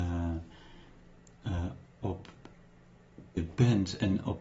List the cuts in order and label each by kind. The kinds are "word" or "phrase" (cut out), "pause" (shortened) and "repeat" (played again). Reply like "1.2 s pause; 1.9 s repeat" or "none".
3.4 s word